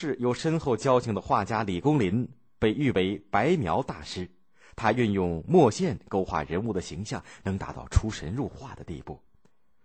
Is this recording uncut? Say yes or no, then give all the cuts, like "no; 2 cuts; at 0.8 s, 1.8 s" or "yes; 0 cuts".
yes; 0 cuts